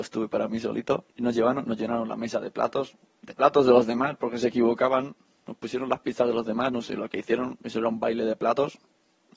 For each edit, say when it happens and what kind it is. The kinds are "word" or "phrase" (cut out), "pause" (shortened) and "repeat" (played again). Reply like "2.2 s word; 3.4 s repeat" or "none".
1.1 s pause